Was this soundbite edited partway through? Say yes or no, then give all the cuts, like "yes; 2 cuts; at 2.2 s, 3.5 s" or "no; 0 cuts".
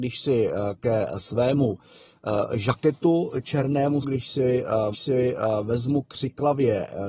yes; 2 cuts; at 4.0 s, 4.9 s